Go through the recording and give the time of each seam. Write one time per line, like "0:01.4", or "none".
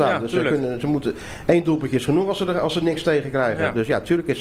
none